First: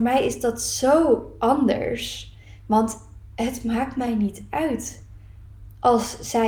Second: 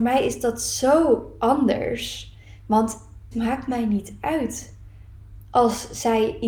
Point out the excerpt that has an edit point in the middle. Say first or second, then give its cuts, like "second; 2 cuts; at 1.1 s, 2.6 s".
second; 1 cut; at 3.3 s